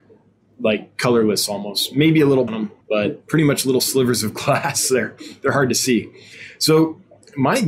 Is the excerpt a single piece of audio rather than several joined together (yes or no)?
no